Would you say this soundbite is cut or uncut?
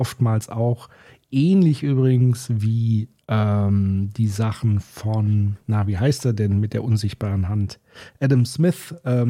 uncut